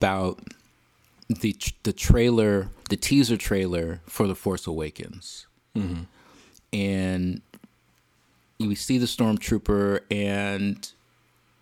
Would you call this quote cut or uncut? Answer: uncut